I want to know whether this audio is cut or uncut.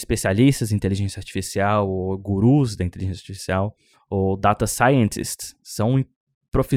cut